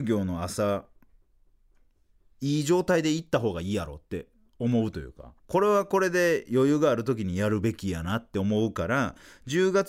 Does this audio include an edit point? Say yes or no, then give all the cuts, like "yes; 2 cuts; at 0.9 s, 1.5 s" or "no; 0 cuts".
yes; 1 cut; at 5.4 s